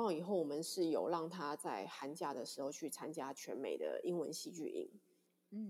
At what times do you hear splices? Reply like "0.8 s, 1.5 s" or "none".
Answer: none